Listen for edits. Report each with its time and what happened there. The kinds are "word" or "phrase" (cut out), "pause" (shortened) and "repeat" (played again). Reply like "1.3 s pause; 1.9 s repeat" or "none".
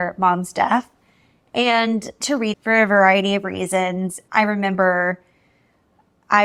2.2 s word; 2.5 s word